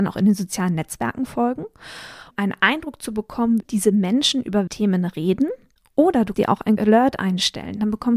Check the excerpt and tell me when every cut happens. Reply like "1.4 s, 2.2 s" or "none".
2.3 s, 3.6 s, 4.7 s, 6.3 s, 6.8 s